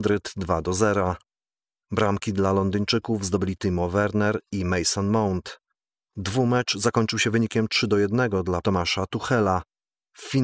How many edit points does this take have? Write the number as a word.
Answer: one